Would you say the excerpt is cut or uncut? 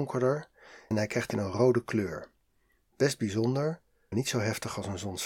cut